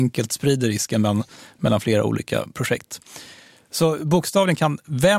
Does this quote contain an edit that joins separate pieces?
no; 0 cuts

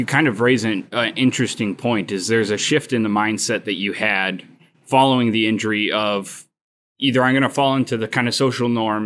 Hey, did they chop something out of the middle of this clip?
no; 0 cuts

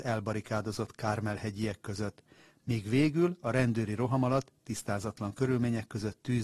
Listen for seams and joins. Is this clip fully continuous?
yes; 0 cuts

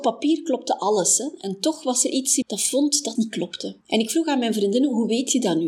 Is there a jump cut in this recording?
yes; 3 cuts; at 2.4 s, 3.1 s, 3.8 s

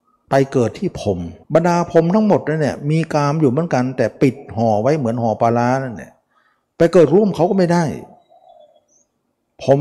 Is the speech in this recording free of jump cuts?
no; 1 cut; at 1.4 s

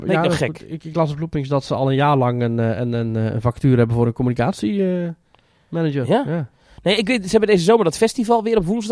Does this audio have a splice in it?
no; 0 cuts

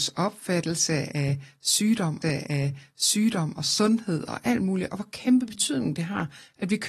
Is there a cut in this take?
yes; 1 cut; at 2.2 s

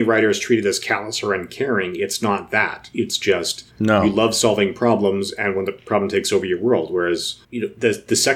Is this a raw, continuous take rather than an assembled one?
no; 2 cuts; at 3.7 s, 7.4 s

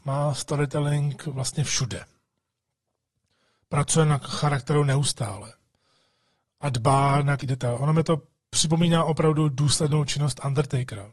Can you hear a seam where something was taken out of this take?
yes; 1 cut; at 7.4 s

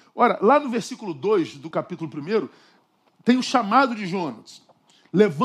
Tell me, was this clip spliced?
yes; 1 cut; at 1.7 s

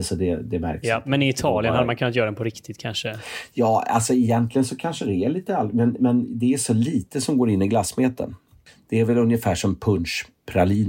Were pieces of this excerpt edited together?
no; 0 cuts

